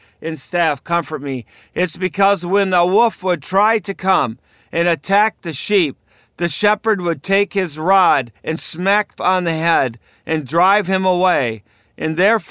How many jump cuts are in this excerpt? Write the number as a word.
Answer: two